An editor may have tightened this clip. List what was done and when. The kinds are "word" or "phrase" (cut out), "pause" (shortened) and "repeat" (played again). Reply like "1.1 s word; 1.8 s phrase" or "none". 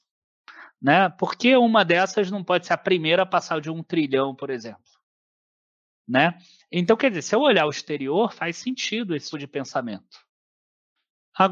9.3 s word